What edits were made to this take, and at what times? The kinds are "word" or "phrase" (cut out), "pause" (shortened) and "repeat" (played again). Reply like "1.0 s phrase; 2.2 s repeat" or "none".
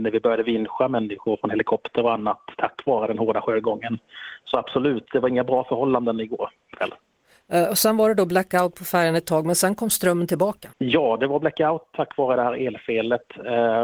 10.7 s pause